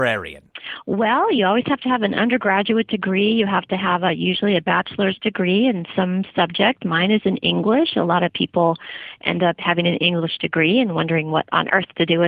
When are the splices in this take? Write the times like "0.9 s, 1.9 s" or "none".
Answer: none